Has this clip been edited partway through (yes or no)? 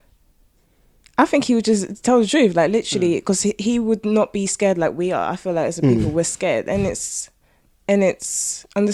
no